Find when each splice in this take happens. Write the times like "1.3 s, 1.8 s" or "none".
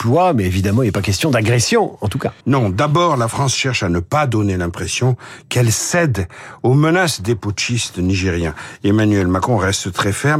2.4 s

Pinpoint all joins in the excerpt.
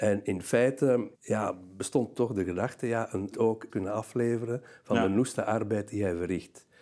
1.1 s, 2.2 s, 3.3 s, 3.7 s

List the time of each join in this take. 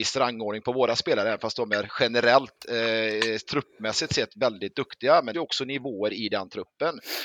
5.3 s

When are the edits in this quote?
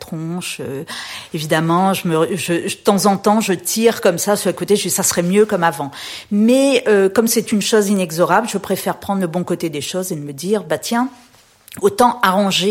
none

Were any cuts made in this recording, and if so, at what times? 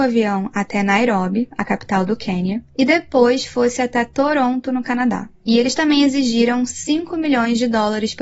none

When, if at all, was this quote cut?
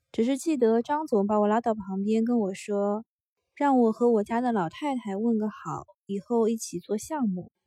none

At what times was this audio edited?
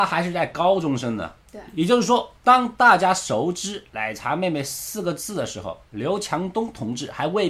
1.4 s, 2.4 s, 5.9 s

